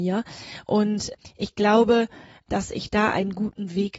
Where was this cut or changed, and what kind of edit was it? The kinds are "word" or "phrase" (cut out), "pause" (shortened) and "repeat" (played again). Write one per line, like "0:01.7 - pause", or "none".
none